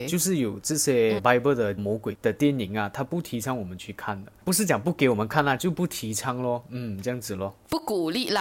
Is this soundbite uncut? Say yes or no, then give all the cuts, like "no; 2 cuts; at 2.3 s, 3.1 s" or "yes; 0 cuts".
no; 1 cut; at 1.2 s